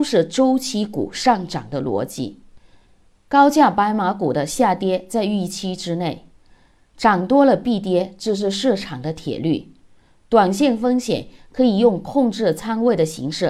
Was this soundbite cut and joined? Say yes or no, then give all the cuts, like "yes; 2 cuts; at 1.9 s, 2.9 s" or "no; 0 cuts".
no; 0 cuts